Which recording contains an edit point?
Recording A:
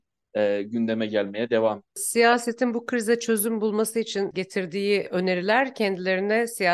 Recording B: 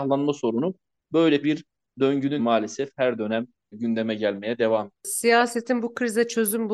B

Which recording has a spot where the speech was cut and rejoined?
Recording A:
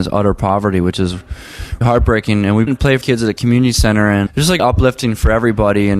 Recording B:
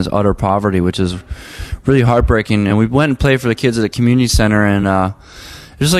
A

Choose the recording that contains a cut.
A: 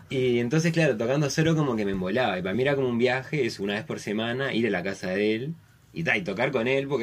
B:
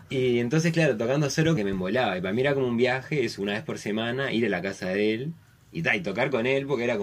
B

